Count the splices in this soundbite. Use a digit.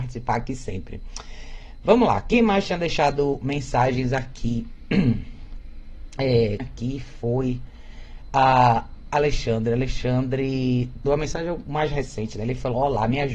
2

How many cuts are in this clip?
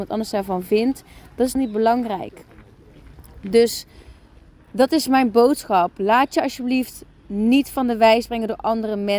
1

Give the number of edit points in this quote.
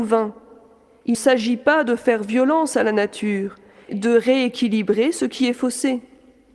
2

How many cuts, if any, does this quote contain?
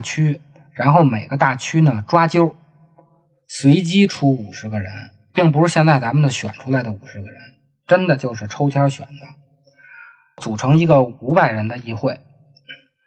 0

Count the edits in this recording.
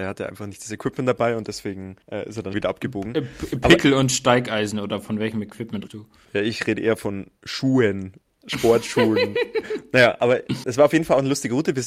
6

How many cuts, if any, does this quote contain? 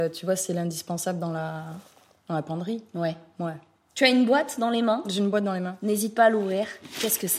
0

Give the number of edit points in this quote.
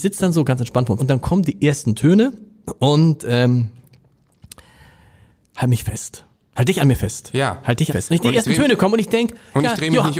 2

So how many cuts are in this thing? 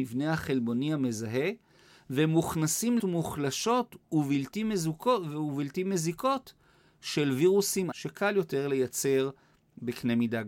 2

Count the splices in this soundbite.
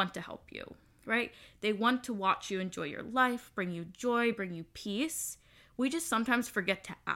0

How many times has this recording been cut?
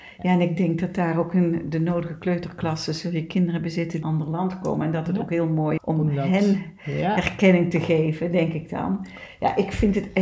2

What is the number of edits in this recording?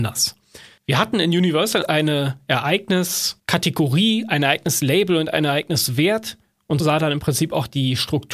2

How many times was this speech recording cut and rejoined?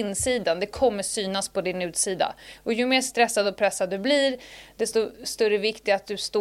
0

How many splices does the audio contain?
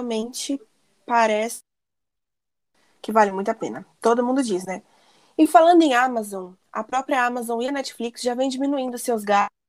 0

